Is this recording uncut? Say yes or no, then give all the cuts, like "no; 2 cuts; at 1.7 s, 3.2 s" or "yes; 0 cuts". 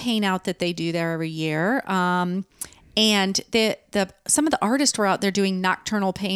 yes; 0 cuts